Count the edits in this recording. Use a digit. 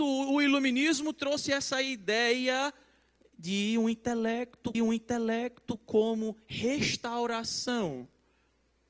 1